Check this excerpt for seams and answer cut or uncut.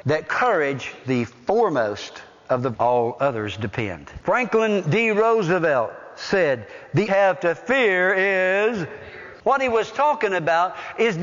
cut